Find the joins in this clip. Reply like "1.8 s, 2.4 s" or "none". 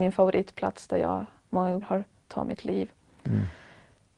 1.8 s, 2.3 s